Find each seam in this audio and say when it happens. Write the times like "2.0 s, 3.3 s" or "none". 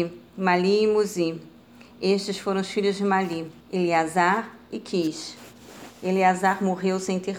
3.6 s